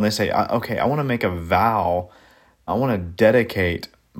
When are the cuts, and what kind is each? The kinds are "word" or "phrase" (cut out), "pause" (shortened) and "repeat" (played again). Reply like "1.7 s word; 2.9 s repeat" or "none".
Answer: 2.7 s word